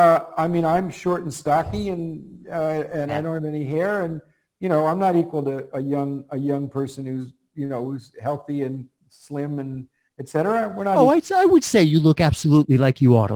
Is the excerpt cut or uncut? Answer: uncut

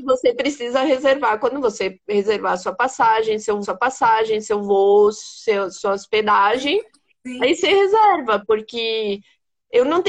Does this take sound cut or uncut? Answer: cut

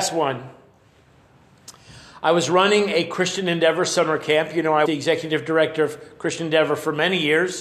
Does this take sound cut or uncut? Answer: cut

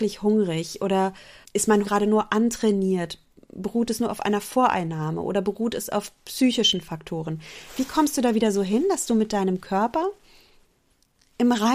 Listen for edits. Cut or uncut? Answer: cut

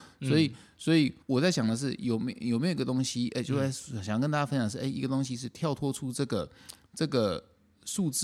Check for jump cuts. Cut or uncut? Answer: cut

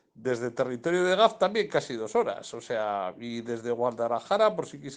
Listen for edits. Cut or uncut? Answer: uncut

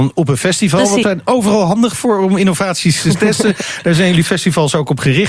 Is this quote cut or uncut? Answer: cut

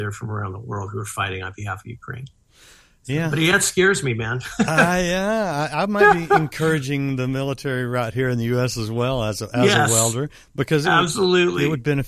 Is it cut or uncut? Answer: uncut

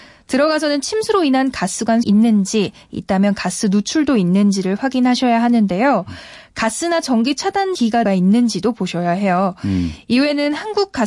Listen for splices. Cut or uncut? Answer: cut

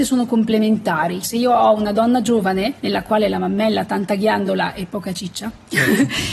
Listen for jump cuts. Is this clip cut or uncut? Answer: cut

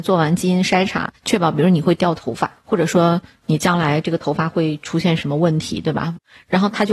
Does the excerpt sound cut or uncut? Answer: cut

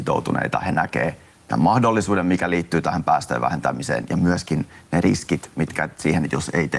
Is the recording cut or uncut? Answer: uncut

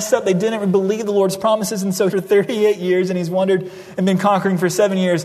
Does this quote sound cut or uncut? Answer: cut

